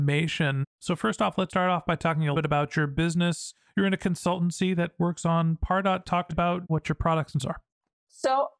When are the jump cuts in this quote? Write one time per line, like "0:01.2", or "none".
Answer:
0:01.5
0:02.3
0:06.3
0:07.4